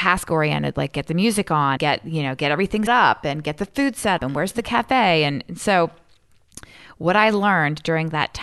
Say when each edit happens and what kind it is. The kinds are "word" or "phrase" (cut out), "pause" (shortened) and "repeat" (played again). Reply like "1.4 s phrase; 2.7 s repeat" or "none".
1.8 s word; 2.9 s word; 4.2 s word